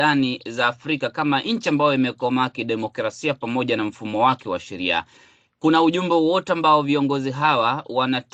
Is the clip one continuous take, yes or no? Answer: yes